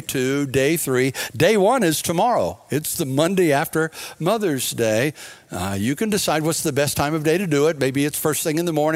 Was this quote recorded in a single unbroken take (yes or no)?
yes